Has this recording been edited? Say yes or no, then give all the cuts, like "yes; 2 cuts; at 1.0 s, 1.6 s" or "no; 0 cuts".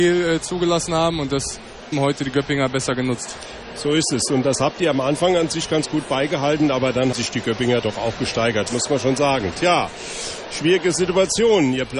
yes; 2 cuts; at 1.9 s, 7.1 s